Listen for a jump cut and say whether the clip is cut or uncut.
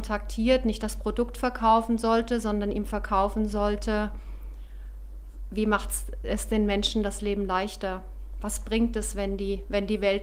uncut